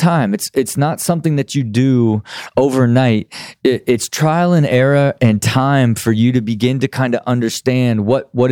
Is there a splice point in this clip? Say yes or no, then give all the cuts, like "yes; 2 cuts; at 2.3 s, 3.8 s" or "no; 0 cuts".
no; 0 cuts